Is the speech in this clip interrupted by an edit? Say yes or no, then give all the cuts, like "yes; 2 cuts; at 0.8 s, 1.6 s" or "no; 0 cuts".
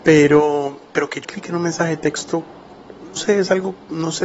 yes; 2 cuts; at 1.2 s, 3.2 s